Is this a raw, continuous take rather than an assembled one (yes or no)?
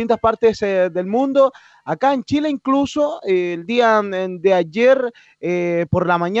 yes